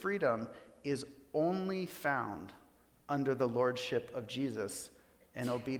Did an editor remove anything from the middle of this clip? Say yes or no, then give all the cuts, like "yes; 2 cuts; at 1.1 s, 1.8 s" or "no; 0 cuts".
no; 0 cuts